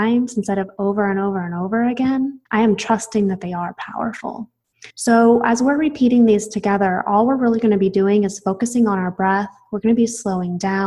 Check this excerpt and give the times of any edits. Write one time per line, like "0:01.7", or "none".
0:02.5
0:04.9